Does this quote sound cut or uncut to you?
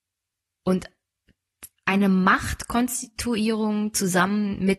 cut